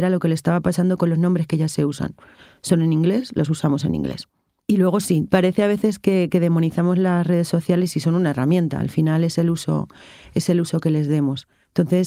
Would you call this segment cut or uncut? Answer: uncut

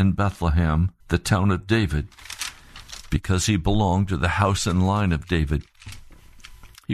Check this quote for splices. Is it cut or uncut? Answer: cut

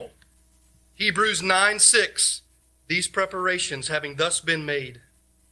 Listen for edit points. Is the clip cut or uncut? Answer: cut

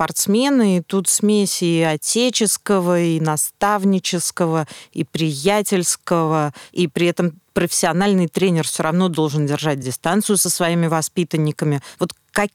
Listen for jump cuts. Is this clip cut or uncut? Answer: uncut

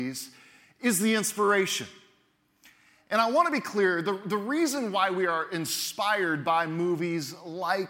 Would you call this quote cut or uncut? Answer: uncut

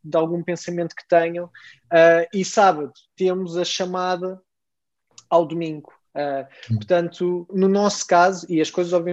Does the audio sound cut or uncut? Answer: cut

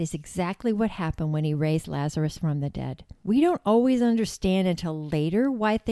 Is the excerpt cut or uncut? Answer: cut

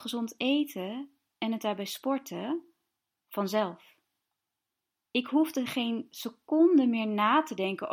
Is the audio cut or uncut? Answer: uncut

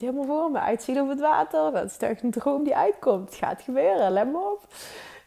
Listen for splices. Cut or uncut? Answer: uncut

